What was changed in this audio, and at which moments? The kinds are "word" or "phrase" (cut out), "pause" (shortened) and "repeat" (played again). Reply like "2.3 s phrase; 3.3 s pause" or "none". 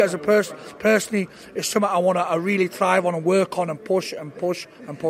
none